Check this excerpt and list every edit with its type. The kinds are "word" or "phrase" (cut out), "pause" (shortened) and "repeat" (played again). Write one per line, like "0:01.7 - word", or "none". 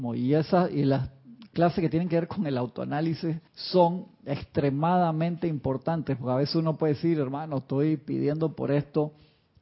0:03.5 - pause